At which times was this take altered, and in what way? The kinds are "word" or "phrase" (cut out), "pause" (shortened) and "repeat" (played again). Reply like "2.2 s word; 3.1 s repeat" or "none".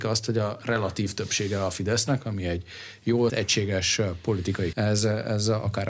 3.3 s word; 4.7 s word

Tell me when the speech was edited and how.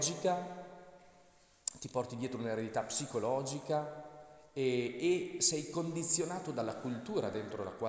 none

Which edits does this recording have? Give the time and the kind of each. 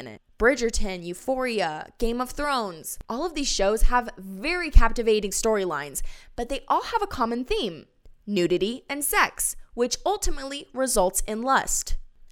3.0 s pause

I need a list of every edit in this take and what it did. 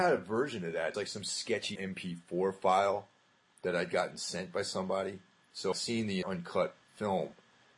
0.9 s word; 1.8 s word; 5.7 s word; 6.2 s word

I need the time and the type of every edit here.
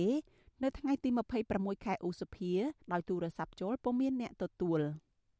2.8 s pause

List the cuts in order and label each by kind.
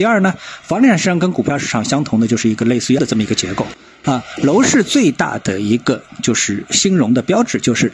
3.0 s word

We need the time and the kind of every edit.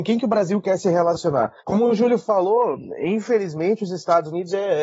1.6 s pause

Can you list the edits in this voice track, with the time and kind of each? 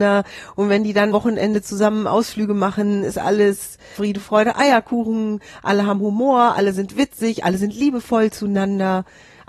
1.1 s word; 3.9 s word

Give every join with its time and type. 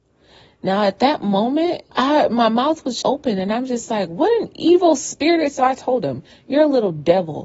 1.9 s pause; 3.0 s word

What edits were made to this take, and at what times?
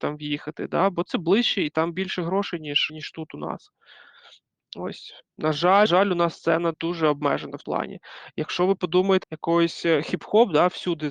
1.1 s word; 2.9 s word; 5.9 s word; 6.7 s word; 7.6 s word; 9.2 s word

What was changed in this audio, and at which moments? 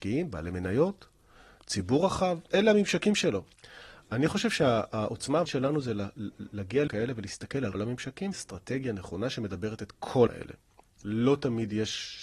2.5 s word; 5.5 s word; 6.9 s word; 7.7 s word; 8.3 s word; 10.3 s word

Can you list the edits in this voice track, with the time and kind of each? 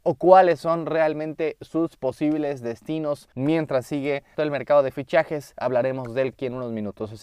3.3 s pause; 4.3 s word; 6.3 s word

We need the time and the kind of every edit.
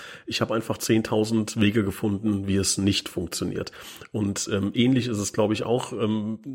none

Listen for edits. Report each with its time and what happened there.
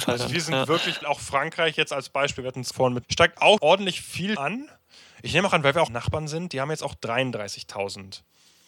1.0 s word; 2.7 s word; 3.0 s word; 3.6 s word; 4.4 s word; 5.9 s word

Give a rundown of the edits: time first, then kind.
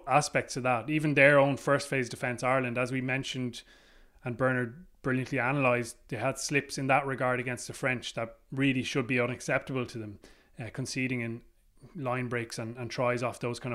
none

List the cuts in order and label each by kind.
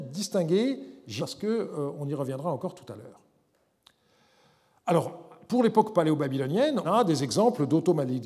1.2 s word; 6.8 s word

